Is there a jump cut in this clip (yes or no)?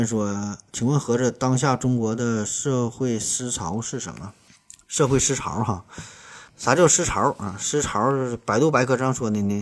yes